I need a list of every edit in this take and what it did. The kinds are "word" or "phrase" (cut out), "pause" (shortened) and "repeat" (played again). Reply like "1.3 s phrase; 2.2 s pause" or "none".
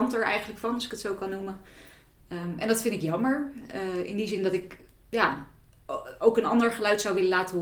none